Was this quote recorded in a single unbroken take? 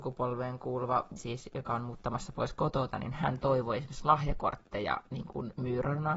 no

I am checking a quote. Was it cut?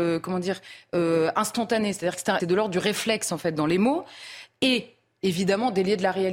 yes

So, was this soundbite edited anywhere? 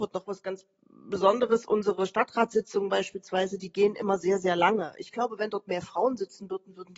no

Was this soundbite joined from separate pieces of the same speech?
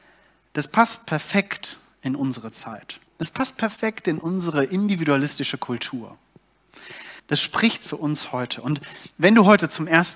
yes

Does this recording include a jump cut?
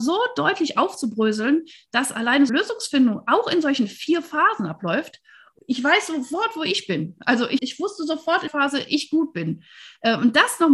yes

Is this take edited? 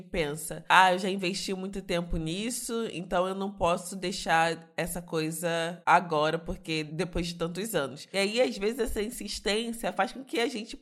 no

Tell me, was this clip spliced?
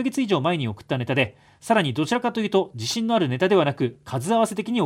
no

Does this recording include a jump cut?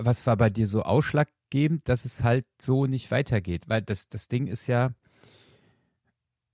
no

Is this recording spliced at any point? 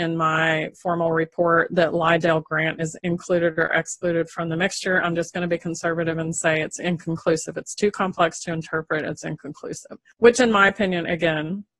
no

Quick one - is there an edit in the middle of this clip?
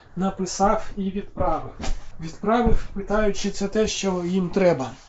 no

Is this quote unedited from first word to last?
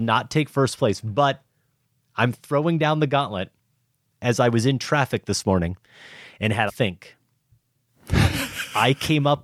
no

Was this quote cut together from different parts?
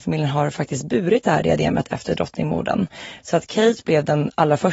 no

